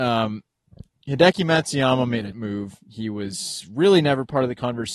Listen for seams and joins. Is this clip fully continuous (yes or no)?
no